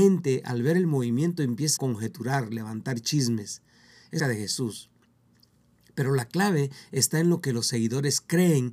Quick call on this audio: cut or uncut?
cut